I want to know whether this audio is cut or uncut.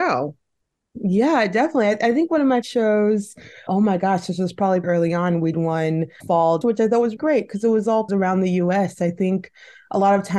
cut